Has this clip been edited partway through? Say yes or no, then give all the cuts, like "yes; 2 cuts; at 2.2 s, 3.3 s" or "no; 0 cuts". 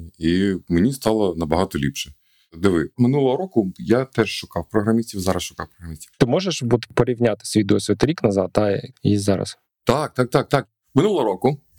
yes; 1 cut; at 6.1 s